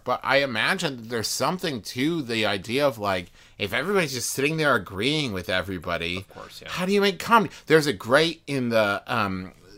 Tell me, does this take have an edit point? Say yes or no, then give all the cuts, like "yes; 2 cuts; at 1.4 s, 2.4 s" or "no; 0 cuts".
no; 0 cuts